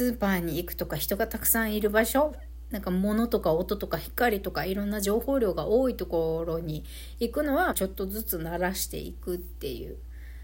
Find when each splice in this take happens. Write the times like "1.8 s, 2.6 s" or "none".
7.7 s